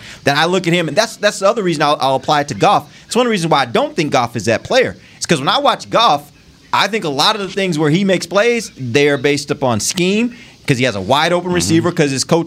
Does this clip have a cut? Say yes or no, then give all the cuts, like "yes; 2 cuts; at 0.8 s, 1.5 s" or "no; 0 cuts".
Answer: no; 0 cuts